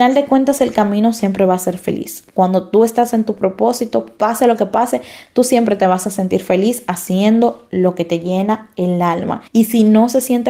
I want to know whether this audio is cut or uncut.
cut